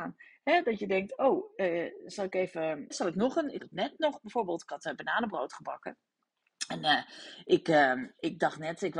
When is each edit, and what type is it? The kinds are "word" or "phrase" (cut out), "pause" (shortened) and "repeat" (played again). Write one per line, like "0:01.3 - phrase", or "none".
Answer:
0:02.9 - word
0:03.6 - word

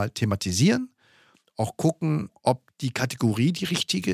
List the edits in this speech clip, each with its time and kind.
none

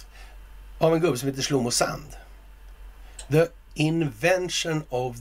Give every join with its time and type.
none

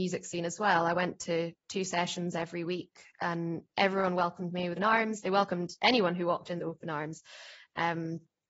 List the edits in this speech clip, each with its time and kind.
0:04.8 - word
0:06.6 - phrase

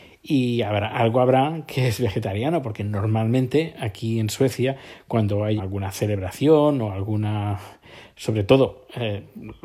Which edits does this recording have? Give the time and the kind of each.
0:05.6 - word

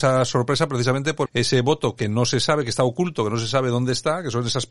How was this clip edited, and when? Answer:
0:01.3 - word

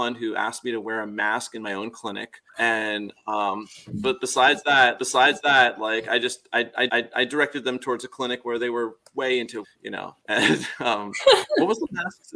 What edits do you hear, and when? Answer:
0:02.5 - pause
0:05.0 - repeat
0:06.9 - repeat
0:09.6 - phrase
0:10.2 - pause

